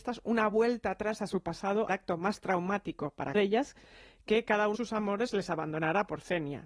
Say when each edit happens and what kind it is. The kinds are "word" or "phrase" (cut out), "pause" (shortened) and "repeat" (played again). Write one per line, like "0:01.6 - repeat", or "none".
0:01.9 - word
0:03.3 - phrase
0:04.7 - word